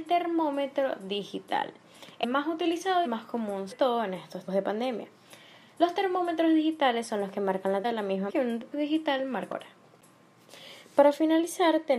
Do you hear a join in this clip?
yes; 8 cuts; at 2.2 s, 3.0 s, 3.7 s, 4.5 s, 7.8 s, 8.3 s, 8.7 s, 9.5 s

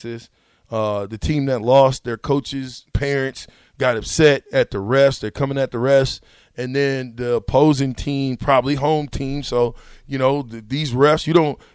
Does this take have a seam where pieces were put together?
yes; 1 cut; at 2.9 s

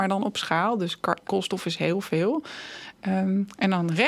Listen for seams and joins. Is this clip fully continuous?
no; 1 cut; at 1.2 s

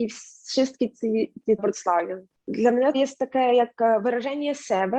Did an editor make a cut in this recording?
yes; 2 cuts; at 1.6 s, 2.9 s

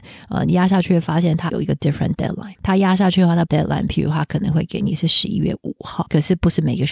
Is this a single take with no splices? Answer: no; 2 cuts; at 1.5 s, 3.5 s

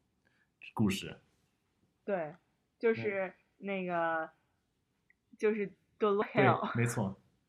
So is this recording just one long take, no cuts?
no; 1 cut; at 6.2 s

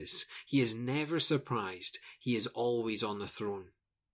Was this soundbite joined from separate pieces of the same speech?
no; 0 cuts

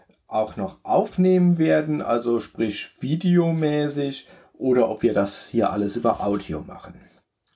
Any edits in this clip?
no; 0 cuts

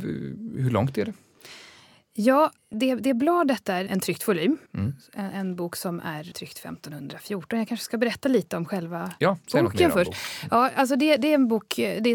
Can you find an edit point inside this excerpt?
yes; 4 cuts; at 2.6 s, 3.9 s, 4.7 s, 6.3 s

